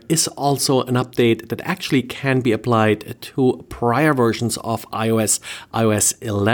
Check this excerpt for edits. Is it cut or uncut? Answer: uncut